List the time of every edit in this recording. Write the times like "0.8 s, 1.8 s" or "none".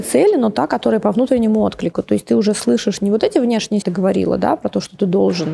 3.8 s